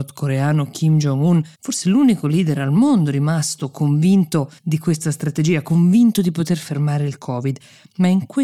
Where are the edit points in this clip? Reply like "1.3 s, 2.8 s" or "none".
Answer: 1.5 s, 4.6 s